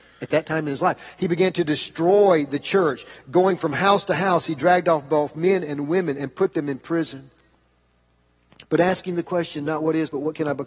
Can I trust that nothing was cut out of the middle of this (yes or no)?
yes